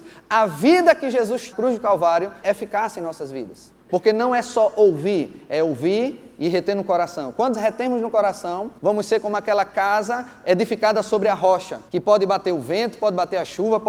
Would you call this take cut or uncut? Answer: cut